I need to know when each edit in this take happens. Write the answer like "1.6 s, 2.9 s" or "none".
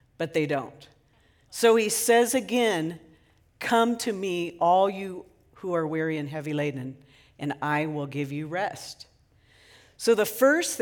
none